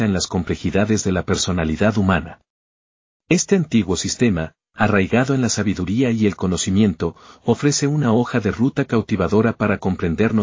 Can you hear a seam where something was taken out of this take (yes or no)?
no